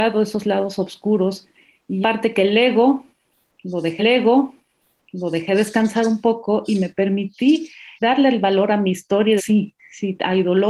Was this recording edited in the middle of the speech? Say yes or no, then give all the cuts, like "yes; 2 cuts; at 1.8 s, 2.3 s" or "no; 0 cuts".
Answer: yes; 5 cuts; at 2.0 s, 4.0 s, 8.0 s, 9.4 s, 9.8 s